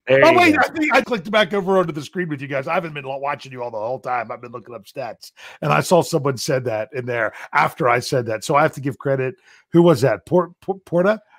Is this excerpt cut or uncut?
cut